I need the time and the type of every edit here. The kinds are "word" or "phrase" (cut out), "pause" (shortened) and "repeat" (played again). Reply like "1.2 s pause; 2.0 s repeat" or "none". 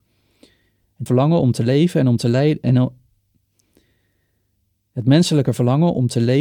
1.1 s word